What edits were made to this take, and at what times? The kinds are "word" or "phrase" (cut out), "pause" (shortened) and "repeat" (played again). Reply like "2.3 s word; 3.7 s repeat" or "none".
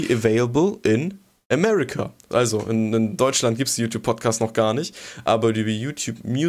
none